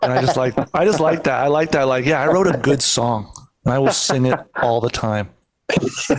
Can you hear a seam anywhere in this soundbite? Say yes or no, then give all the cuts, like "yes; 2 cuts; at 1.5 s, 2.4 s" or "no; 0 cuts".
no; 0 cuts